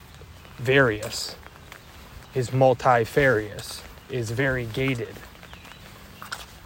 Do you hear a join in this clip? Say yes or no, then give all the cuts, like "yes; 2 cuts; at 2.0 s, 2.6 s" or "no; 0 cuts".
yes; 1 cut; at 2.2 s